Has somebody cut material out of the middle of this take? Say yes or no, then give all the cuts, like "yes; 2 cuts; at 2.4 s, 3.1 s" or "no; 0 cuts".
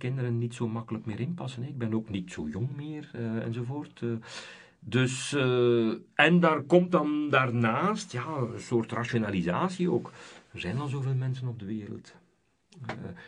no; 0 cuts